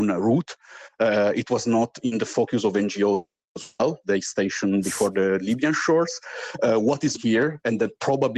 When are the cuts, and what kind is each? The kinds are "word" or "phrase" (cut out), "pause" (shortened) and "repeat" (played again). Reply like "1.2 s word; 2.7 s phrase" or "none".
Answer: 4.0 s word; 7.1 s word